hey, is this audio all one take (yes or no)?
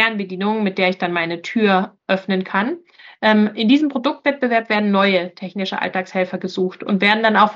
yes